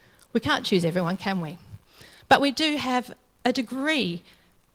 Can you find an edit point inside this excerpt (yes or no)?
no